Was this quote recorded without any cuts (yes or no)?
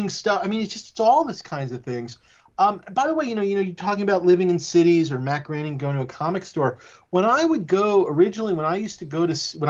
yes